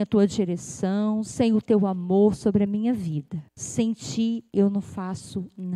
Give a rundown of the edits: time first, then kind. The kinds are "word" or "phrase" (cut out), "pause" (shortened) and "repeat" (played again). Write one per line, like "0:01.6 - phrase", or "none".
0:03.5 - pause